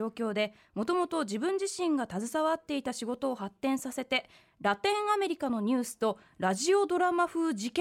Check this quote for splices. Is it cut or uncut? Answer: uncut